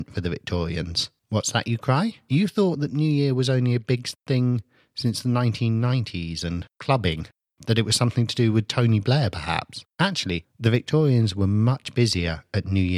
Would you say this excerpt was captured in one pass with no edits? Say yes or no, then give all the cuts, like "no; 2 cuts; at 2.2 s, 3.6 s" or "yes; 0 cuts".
yes; 0 cuts